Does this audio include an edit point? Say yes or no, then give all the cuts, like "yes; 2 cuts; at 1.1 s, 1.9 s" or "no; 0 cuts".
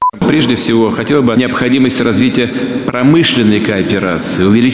yes; 1 cut; at 1.3 s